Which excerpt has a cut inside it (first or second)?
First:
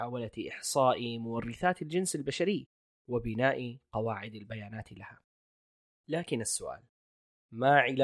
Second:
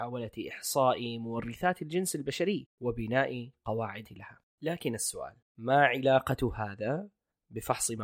second